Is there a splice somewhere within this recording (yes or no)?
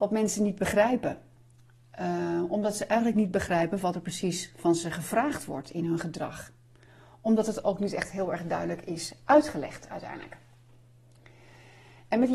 no